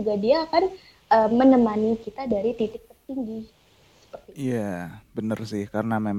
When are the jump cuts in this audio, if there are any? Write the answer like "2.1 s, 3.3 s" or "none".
5.0 s